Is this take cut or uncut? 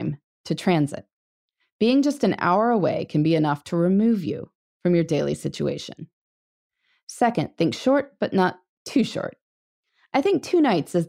uncut